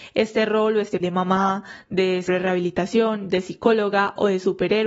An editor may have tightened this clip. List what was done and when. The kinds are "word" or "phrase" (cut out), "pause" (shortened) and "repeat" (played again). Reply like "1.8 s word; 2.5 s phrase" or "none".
1.0 s word; 2.3 s word